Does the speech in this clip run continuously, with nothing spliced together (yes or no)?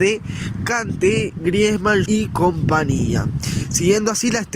no